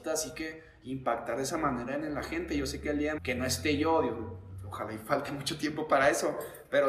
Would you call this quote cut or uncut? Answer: cut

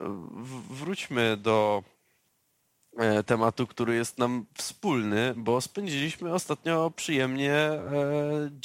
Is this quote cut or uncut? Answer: uncut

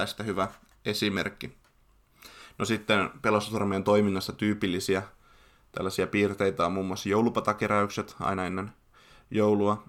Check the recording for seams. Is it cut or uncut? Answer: uncut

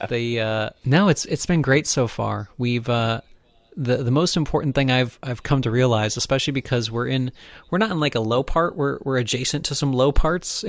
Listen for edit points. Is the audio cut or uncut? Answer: uncut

